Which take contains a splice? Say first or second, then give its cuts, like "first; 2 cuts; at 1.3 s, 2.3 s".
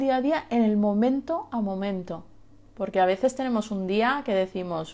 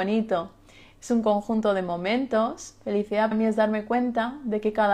second; 1 cut; at 3.3 s